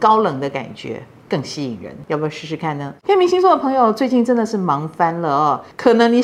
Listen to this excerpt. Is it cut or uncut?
cut